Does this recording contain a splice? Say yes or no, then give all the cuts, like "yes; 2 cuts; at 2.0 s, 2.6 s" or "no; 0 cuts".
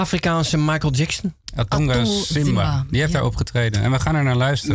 no; 0 cuts